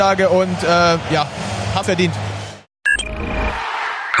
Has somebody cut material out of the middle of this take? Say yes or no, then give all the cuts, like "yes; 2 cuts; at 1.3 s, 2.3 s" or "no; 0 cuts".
yes; 1 cut; at 1.8 s